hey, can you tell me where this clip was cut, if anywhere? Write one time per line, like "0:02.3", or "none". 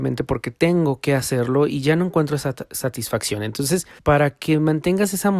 0:04.0